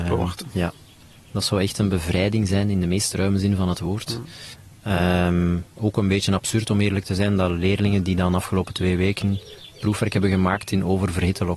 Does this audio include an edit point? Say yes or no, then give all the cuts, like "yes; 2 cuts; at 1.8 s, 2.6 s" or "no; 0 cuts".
no; 0 cuts